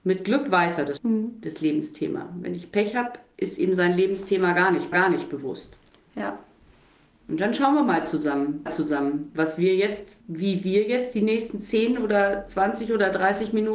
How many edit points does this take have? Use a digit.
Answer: 4